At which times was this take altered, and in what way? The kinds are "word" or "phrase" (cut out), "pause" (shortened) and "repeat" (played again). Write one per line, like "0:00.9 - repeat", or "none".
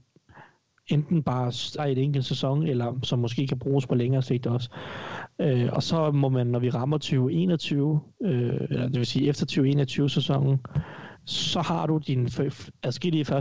0:01.8 - word